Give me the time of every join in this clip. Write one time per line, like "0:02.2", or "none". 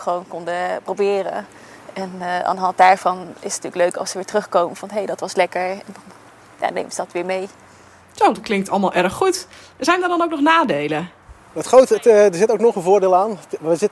none